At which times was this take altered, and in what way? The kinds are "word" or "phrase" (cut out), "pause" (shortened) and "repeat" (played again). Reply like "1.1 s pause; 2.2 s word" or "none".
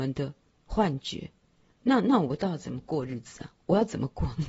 none